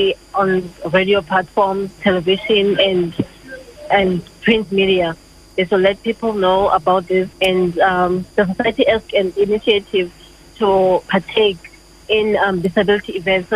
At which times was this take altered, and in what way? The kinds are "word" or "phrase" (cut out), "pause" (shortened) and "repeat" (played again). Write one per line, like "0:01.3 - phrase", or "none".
0:02.0 - word
0:07.3 - pause
0:08.3 - pause
0:09.1 - phrase